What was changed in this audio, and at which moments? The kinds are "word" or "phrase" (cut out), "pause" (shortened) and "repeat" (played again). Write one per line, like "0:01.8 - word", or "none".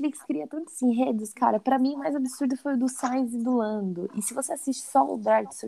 none